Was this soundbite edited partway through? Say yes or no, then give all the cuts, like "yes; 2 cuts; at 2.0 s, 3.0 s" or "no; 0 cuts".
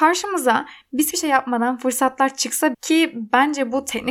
yes; 2 cuts; at 1.1 s, 2.7 s